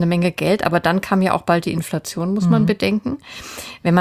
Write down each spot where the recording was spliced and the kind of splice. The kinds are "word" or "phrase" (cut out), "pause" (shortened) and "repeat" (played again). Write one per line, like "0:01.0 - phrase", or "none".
none